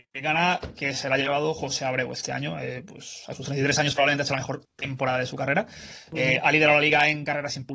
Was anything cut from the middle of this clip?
yes; 1 cut; at 4.6 s

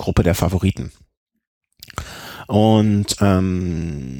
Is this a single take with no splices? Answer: yes; 0 cuts

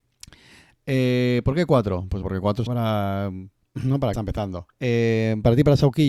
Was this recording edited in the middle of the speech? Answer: yes; 5 cuts; at 2.2 s, 2.7 s, 3.6 s, 4.1 s, 4.7 s

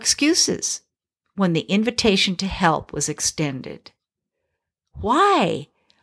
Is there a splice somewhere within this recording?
no; 0 cuts

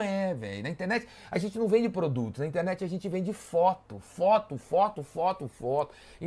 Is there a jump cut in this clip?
no; 0 cuts

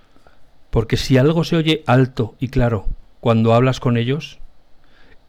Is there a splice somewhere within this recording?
no; 0 cuts

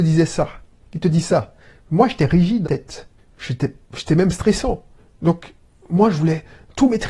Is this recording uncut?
no; 1 cut; at 2.6 s

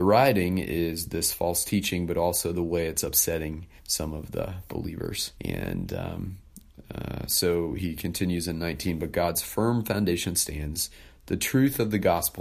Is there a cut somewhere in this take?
yes; 2 cuts; at 3.8 s, 5.3 s

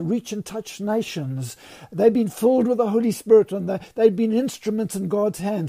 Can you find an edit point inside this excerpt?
no; 0 cuts

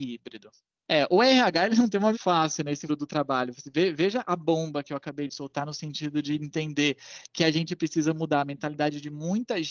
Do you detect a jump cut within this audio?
yes; 2 cuts; at 2.1 s, 2.9 s

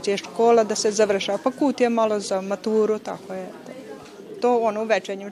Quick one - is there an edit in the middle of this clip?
no; 0 cuts

